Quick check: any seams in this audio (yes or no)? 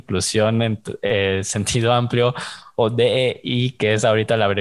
no